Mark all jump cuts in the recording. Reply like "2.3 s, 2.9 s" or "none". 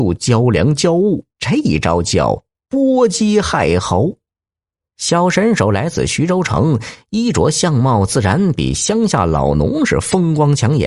1.3 s, 4.7 s

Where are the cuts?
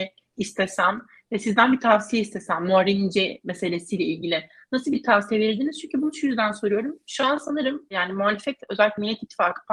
none

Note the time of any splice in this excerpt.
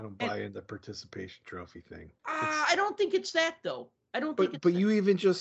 2.2 s

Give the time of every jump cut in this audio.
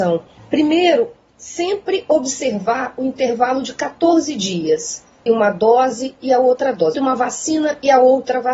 5.3 s, 6.9 s

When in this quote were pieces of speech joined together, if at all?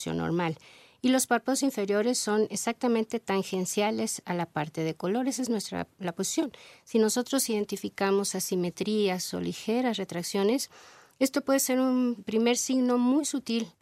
none

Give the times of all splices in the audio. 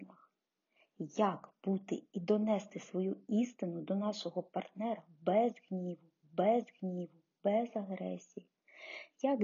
2.1 s, 6.2 s

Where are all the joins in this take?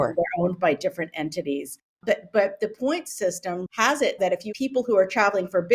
3.7 s, 4.2 s, 4.5 s

